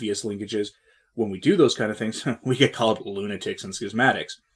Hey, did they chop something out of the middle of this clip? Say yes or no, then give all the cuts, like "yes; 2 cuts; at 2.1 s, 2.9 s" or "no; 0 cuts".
no; 0 cuts